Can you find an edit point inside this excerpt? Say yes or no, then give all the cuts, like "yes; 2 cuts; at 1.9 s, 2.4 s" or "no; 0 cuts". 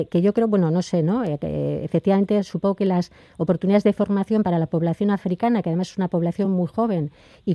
no; 0 cuts